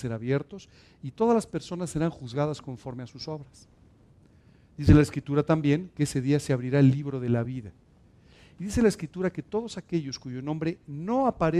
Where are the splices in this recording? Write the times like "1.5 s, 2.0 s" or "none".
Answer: none